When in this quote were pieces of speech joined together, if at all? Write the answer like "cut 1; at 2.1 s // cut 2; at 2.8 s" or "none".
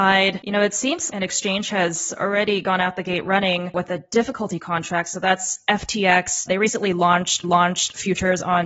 cut 1; at 1.1 s // cut 2; at 7.4 s